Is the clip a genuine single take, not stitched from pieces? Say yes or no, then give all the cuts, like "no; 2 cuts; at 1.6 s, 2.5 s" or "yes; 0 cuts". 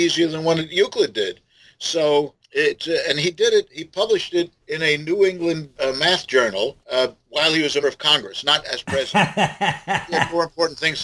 no; 5 cuts; at 2.4 s, 4.6 s, 5.7 s, 6.8 s, 7.8 s